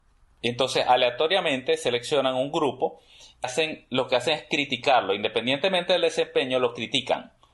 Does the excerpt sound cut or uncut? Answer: cut